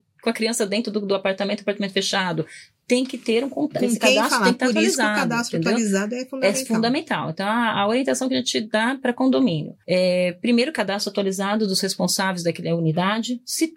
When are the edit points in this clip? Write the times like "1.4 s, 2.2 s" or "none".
9.8 s

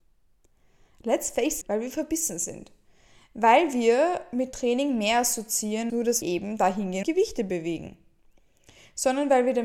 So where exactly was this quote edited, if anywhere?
1.6 s, 5.9 s, 6.2 s, 7.0 s

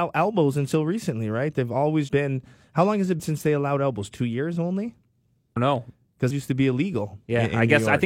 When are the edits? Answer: 2.1 s, 3.2 s, 5.6 s, 6.3 s

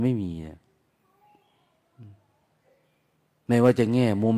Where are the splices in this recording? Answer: none

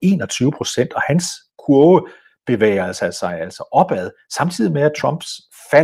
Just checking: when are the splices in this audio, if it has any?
none

